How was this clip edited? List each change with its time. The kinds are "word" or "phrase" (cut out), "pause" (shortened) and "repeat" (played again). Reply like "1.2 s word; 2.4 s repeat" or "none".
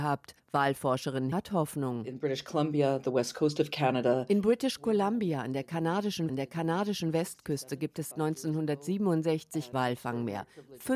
1.3 s word; 6.3 s repeat; 8.1 s word; 9.7 s word